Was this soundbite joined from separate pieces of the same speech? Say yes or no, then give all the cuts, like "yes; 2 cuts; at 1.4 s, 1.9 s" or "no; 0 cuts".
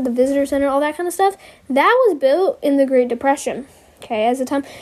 no; 0 cuts